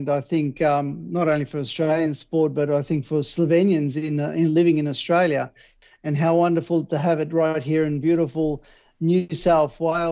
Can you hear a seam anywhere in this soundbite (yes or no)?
no